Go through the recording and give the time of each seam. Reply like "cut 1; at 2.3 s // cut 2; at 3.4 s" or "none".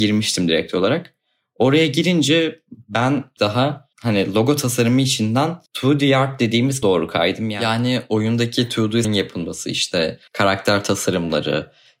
cut 1; at 3.4 s // cut 2; at 3.9 s // cut 3; at 5.7 s // cut 4; at 6.8 s // cut 5; at 9.0 s // cut 6; at 10.3 s